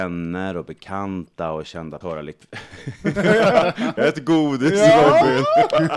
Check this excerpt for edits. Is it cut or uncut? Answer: cut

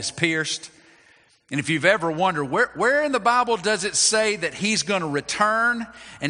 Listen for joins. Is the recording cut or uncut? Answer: uncut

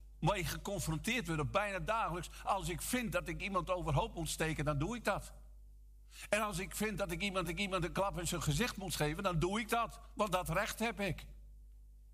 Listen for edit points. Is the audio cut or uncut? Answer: cut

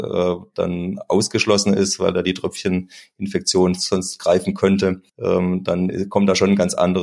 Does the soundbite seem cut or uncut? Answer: cut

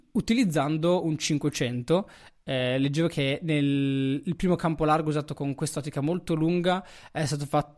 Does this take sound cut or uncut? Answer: uncut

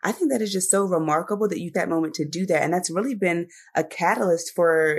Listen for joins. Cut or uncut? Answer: cut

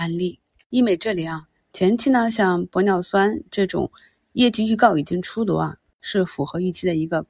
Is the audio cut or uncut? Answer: uncut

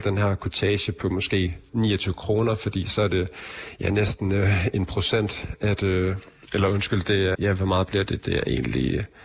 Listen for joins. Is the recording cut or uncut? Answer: cut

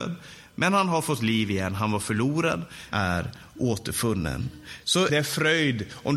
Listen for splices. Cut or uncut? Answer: cut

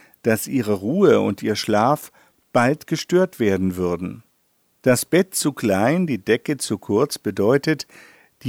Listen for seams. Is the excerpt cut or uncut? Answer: uncut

